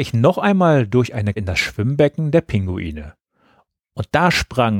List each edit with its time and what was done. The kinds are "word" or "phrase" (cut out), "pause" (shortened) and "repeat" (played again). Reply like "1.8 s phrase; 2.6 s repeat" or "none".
1.4 s word